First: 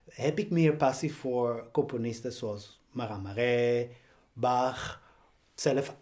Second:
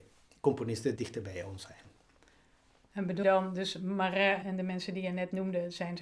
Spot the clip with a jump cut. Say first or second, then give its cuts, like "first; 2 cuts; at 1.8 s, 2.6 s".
second; 3 cuts; at 1.0 s, 3.2 s, 4.4 s